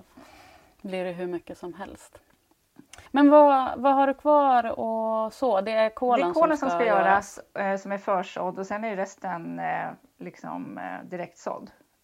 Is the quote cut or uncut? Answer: cut